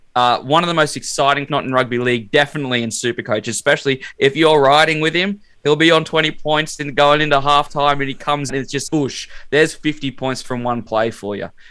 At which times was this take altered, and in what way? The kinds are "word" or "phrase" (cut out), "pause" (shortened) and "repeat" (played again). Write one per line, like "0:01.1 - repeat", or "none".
0:01.5 - phrase
0:08.5 - word
0:08.9 - word